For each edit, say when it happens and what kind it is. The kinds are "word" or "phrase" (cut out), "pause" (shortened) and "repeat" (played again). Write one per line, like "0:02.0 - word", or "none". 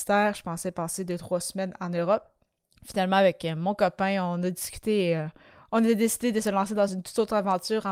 none